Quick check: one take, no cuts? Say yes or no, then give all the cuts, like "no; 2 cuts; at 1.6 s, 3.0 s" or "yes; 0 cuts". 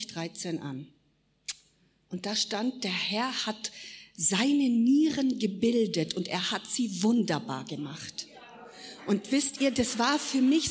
yes; 0 cuts